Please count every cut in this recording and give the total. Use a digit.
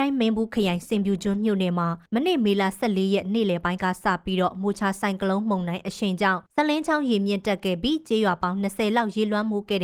2